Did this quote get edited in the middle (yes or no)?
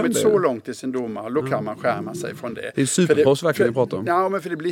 no